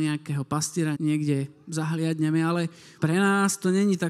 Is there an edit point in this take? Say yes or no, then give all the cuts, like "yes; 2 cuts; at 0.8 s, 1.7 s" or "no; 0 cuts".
yes; 2 cuts; at 0.9 s, 3.0 s